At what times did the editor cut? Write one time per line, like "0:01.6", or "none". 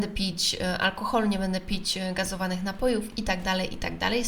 none